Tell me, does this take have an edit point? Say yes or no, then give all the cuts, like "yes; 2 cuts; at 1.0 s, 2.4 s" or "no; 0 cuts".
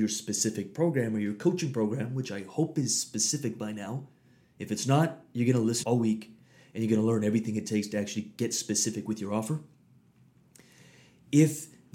yes; 1 cut; at 5.8 s